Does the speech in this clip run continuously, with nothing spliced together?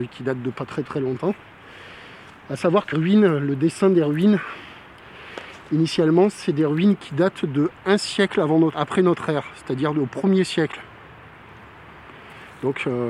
no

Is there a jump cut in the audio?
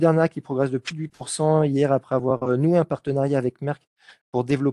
no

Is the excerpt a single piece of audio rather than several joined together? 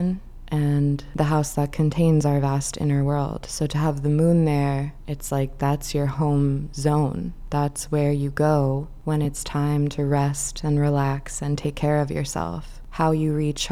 yes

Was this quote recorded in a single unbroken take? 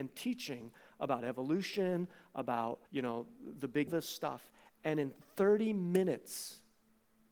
no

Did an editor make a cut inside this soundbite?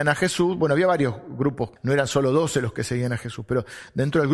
yes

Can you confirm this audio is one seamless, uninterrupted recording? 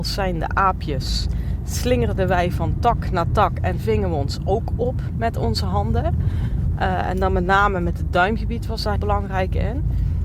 no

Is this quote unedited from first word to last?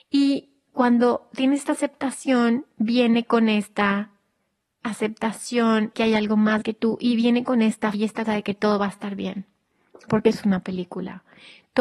no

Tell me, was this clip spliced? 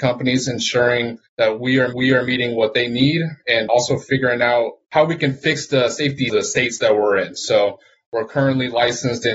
yes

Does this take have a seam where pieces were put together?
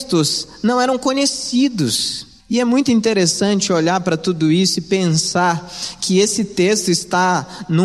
yes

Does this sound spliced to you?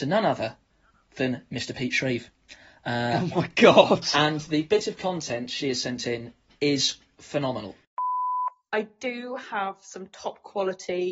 no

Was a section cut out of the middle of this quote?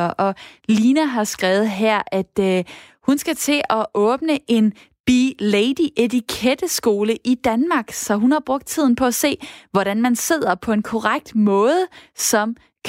no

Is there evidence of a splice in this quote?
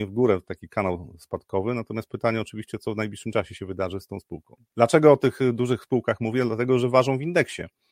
no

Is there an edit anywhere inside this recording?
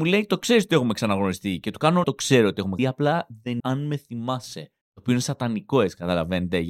yes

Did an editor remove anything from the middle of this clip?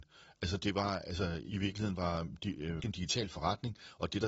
yes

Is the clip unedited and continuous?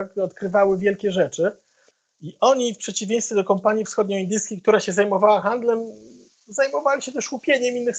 yes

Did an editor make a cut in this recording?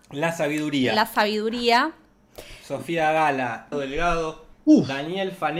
yes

